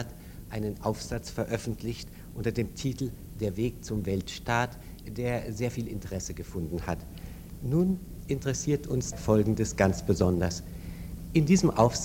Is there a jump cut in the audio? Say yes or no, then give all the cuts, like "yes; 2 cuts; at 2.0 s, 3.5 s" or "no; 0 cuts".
yes; 1 cut; at 9.1 s